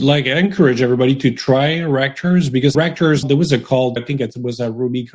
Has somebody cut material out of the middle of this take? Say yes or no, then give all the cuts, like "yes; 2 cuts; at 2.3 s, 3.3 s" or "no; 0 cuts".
yes; 3 cuts; at 2.7 s, 3.2 s, 4.0 s